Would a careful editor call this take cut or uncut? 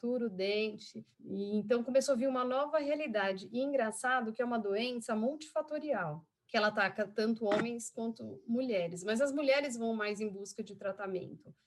cut